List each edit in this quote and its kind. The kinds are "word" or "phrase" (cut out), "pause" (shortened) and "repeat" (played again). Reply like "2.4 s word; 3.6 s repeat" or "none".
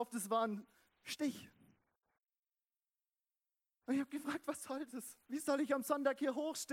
5.2 s pause